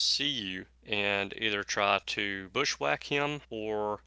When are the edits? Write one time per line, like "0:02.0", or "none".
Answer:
none

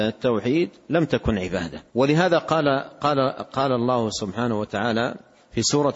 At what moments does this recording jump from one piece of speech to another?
0:01.9

